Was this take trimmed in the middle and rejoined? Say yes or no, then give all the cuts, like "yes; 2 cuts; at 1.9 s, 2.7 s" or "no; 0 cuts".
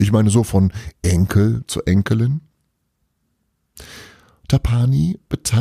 no; 0 cuts